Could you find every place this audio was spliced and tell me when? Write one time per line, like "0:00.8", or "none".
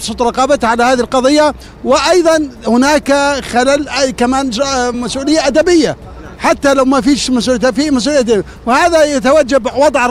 none